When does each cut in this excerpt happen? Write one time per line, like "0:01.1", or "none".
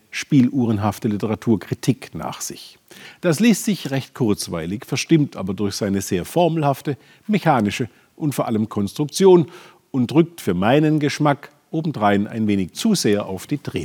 0:08.7